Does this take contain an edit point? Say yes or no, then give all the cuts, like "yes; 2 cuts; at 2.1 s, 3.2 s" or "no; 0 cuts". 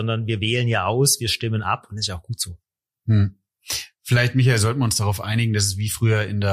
no; 0 cuts